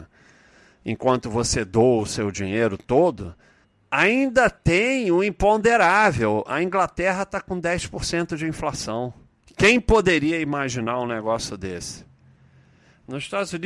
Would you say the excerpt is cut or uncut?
cut